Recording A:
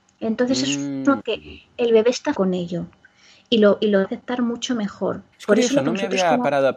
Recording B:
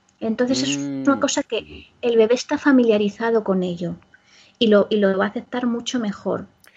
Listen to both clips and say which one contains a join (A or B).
A